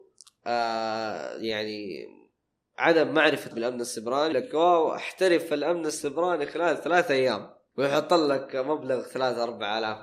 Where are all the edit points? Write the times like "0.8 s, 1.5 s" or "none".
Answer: 3.5 s, 4.3 s